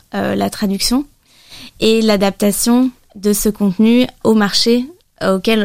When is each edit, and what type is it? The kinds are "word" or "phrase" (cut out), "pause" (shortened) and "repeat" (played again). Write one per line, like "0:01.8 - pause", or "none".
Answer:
0:04.2 - word